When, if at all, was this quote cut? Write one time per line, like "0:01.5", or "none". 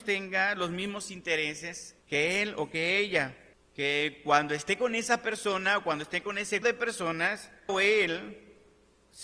0:02.0
0:03.5
0:06.6
0:07.7

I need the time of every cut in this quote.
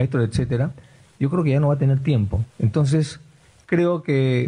0:02.5

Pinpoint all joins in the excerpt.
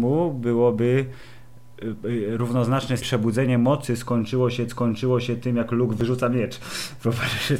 0:03.0
0:04.7

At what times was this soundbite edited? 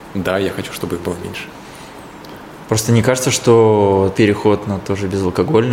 0:04.1

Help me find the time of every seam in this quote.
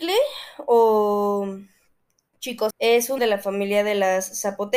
0:02.7
0:03.2

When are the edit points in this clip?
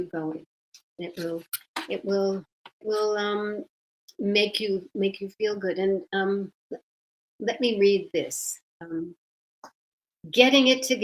0:02.8

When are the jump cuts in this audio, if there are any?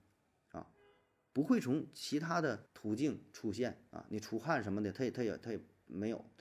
0:02.7

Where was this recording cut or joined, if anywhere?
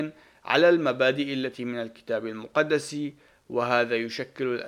none

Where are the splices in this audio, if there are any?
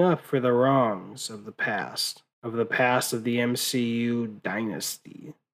0:02.3

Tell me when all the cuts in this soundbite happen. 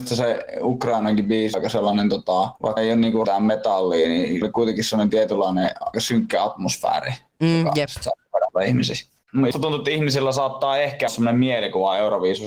0:01.5
0:02.8
0:03.2
0:04.4
0:05.9
0:09.5
0:11.1

